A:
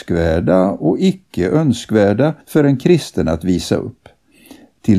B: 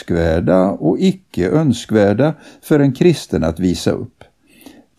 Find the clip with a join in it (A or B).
A